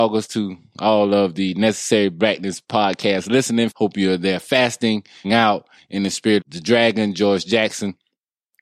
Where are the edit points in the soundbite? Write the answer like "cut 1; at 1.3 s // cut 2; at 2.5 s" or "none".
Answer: cut 1; at 3.7 s // cut 2; at 5.2 s // cut 3; at 6.4 s